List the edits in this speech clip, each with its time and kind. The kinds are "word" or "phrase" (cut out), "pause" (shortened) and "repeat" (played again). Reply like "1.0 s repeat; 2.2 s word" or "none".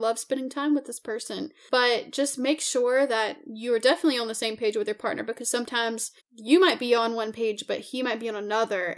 6.2 s pause